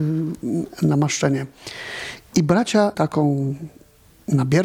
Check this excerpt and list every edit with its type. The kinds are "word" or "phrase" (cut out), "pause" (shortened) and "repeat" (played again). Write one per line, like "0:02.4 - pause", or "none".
0:02.9 - word